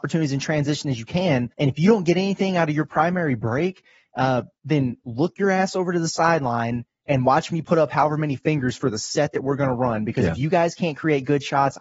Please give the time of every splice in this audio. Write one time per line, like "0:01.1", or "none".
0:01.5